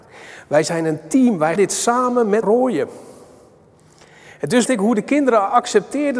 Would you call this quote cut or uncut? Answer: cut